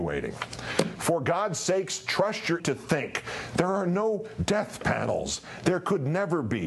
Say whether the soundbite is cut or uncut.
cut